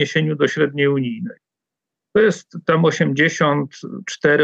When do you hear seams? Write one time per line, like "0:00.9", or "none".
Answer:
none